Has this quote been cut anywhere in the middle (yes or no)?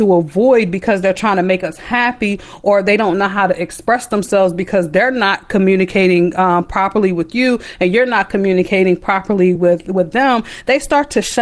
no